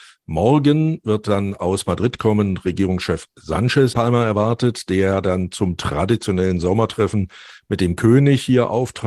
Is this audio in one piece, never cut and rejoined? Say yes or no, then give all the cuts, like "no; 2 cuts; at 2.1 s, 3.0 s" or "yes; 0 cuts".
no; 1 cut; at 3.9 s